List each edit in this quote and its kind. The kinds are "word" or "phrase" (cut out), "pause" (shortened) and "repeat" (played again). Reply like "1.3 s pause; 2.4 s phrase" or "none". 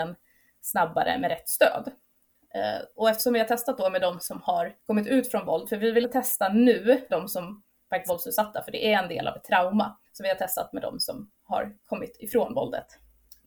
2.9 s pause; 4.8 s pause; 6.0 s word; 7.1 s word; 8.1 s word; 10.0 s pause; 11.8 s pause